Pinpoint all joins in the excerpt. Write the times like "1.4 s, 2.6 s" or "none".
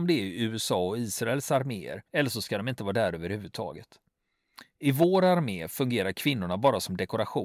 2.1 s